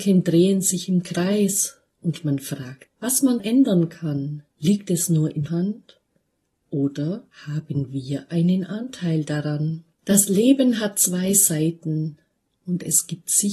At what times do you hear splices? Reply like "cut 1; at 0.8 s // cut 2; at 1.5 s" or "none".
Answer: cut 1; at 2.9 s // cut 2; at 3.4 s // cut 3; at 4.5 s // cut 4; at 5.5 s // cut 5; at 7.3 s // cut 6; at 9.9 s